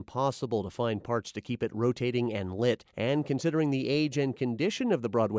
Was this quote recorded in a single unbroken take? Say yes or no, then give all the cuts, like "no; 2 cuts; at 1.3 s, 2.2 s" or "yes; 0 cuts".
no; 1 cut; at 2.9 s